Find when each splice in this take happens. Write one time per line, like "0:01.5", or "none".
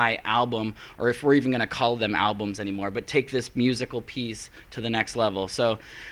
none

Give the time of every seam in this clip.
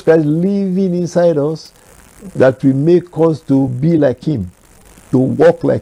none

